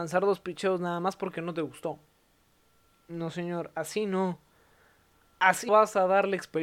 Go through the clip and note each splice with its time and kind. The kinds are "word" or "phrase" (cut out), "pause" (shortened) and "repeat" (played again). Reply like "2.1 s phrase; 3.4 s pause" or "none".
5.7 s word